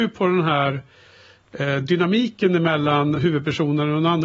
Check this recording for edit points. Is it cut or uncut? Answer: uncut